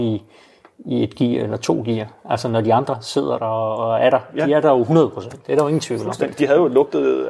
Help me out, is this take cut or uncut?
uncut